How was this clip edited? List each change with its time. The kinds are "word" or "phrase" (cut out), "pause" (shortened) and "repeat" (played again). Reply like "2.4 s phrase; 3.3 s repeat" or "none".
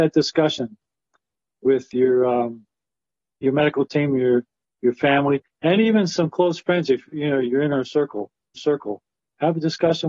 8.6 s repeat